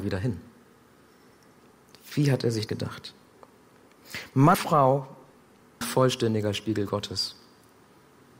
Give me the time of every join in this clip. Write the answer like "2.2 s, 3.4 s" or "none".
2.7 s, 4.5 s, 5.8 s